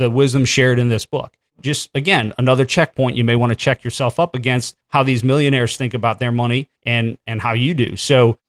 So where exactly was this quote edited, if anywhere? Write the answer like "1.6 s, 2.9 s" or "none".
4.8 s, 6.8 s